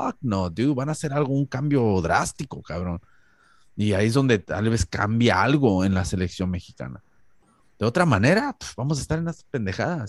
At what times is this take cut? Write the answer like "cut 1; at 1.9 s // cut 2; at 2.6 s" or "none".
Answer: none